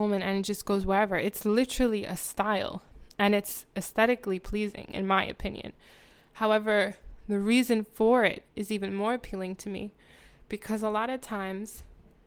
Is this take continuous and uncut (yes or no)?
yes